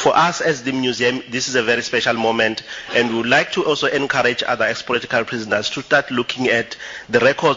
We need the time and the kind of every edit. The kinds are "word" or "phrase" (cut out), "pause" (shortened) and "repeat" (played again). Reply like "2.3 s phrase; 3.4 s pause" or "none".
none